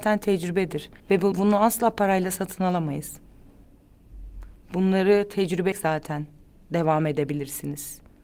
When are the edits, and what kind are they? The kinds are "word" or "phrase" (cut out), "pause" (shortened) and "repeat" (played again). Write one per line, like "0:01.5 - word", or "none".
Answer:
0:01.0 - pause
0:01.3 - word
0:05.7 - word